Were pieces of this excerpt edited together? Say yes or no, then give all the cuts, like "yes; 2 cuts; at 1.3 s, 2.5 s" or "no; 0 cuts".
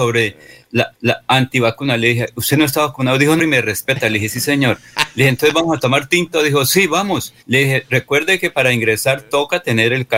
yes; 3 cuts; at 0.9 s, 3.4 s, 7.4 s